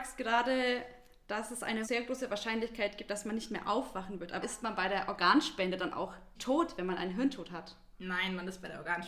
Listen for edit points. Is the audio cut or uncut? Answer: cut